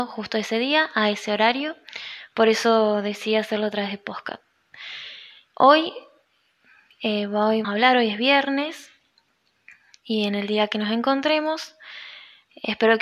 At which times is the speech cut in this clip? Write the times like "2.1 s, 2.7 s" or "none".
7.6 s